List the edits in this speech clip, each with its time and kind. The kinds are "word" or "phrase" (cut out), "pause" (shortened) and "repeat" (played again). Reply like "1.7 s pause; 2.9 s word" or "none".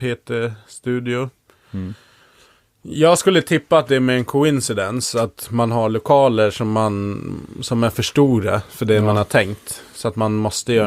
none